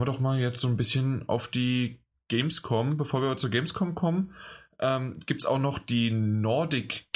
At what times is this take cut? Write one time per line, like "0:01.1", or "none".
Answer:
none